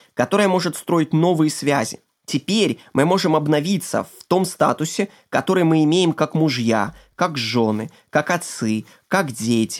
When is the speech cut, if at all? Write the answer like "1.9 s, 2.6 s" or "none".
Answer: none